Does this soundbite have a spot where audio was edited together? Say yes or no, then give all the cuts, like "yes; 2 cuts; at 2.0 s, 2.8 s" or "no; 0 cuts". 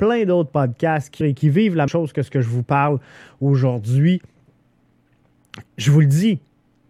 yes; 3 cuts; at 1.2 s, 1.9 s, 5.7 s